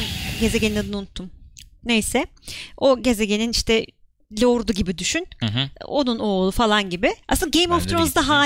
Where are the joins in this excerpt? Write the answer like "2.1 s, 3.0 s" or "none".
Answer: 7.2 s